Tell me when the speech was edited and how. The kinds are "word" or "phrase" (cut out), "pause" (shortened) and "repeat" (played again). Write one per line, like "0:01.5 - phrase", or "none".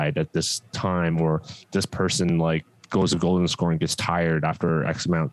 0:02.7 - pause